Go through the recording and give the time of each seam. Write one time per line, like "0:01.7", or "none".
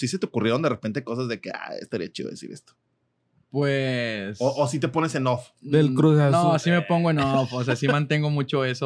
none